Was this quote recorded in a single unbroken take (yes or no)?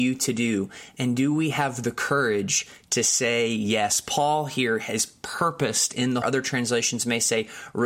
no